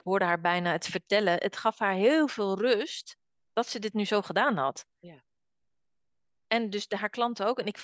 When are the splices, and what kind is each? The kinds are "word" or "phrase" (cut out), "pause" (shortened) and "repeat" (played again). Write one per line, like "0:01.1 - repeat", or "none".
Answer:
none